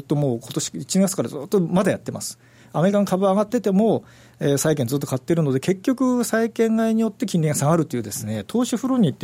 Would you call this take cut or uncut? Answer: uncut